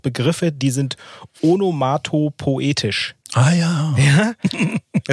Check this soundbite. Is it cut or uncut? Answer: cut